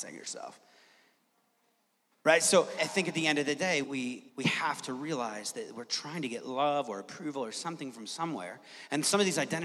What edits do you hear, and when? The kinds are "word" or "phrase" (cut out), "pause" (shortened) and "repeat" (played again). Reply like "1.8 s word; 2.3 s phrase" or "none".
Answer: 2.8 s word; 3.8 s word; 4.3 s pause